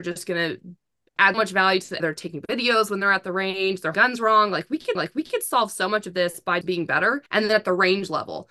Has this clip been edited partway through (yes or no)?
yes